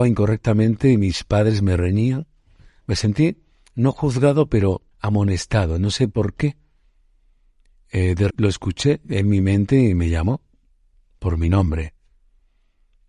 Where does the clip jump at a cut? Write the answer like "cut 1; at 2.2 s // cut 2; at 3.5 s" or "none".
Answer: cut 1; at 4.9 s // cut 2; at 8.3 s